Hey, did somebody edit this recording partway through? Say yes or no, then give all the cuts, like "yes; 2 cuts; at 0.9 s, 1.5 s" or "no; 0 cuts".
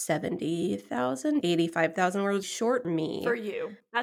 yes; 3 cuts; at 1.4 s, 2.4 s, 2.8 s